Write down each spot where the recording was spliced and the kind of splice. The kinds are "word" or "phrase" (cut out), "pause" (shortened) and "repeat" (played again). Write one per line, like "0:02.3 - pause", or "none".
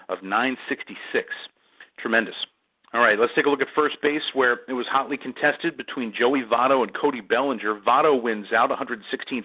none

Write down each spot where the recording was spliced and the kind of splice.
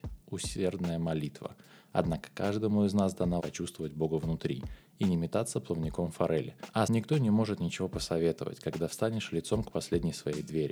0:03.4 - word
0:06.9 - word

